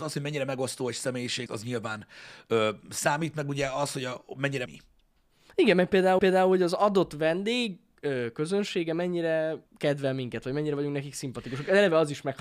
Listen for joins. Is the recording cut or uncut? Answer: cut